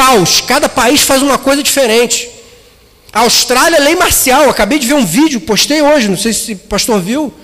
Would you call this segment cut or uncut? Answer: uncut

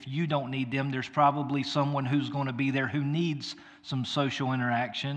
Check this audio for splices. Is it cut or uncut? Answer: uncut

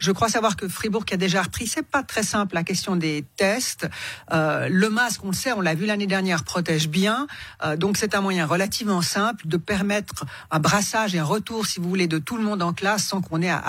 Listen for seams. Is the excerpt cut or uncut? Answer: uncut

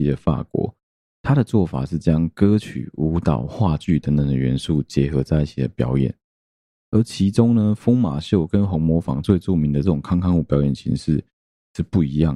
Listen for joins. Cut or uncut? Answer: uncut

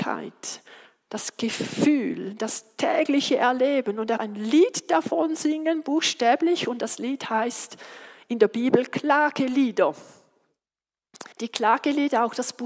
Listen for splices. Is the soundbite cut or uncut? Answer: cut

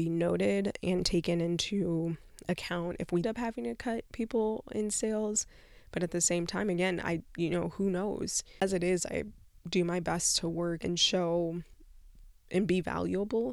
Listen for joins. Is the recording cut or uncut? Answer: cut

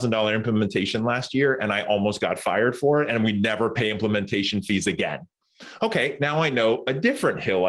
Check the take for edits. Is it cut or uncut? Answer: uncut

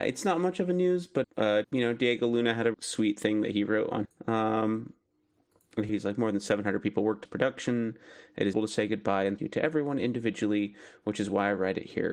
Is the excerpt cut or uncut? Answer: cut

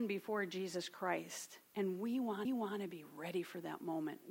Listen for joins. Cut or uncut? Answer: cut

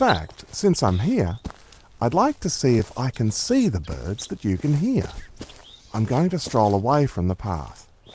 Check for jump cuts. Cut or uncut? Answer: uncut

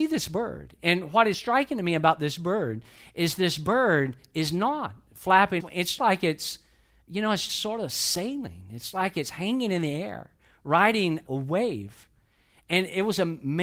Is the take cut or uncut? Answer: cut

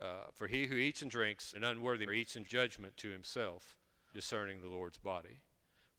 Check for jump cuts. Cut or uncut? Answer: cut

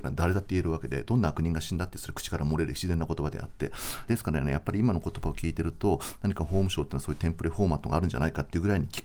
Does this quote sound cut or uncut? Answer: cut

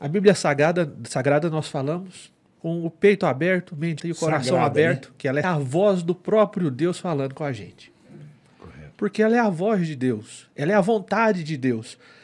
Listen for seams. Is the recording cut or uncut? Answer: cut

